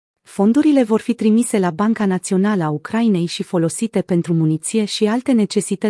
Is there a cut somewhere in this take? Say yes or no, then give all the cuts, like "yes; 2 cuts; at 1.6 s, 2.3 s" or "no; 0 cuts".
no; 0 cuts